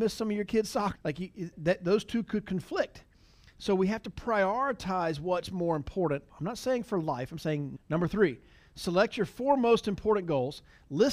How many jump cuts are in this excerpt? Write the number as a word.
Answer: four